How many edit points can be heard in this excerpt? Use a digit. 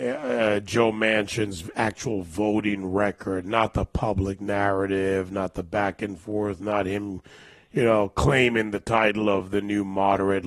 0